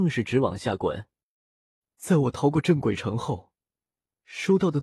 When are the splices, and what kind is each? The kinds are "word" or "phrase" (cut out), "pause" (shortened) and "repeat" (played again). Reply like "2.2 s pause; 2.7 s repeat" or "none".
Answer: none